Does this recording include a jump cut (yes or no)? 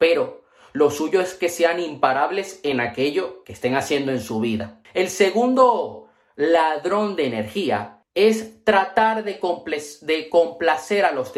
no